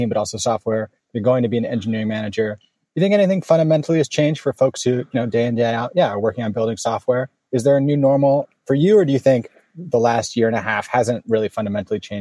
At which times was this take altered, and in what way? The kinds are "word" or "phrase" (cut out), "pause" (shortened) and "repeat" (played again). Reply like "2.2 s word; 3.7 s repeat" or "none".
none